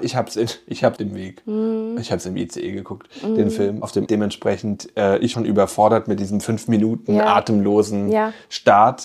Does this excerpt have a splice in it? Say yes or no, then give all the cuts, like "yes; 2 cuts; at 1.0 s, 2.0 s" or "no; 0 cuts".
yes; 3 cuts; at 1.0 s, 4.1 s, 5.3 s